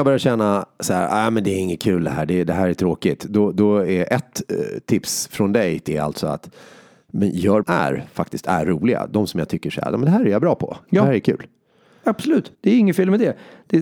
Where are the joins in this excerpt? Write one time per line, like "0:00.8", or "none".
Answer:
0:05.9
0:07.6
0:12.5